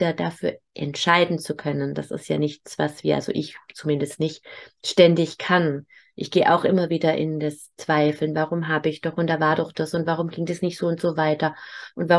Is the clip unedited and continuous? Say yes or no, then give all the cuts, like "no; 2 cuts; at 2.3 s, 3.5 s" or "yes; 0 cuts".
yes; 0 cuts